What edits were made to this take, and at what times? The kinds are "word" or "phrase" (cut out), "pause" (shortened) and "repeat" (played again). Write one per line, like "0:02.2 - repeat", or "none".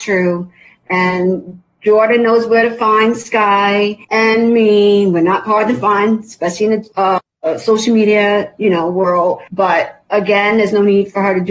0:04.0 - pause
0:06.9 - pause
0:09.5 - pause